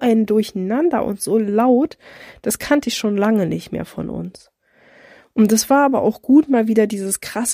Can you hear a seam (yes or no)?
no